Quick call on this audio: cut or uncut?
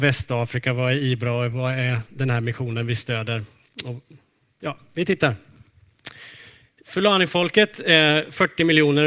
uncut